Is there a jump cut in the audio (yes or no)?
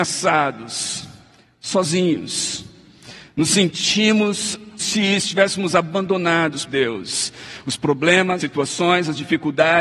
yes